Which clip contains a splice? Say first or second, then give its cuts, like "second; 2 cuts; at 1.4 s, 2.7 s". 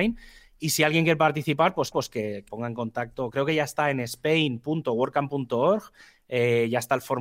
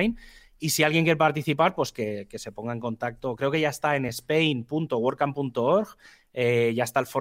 first; 2 cuts; at 1.9 s, 2.5 s